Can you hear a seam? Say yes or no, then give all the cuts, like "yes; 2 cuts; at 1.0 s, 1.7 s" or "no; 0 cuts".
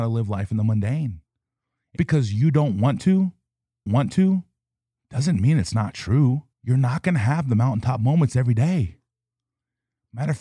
yes; 3 cuts; at 2.0 s, 3.9 s, 6.5 s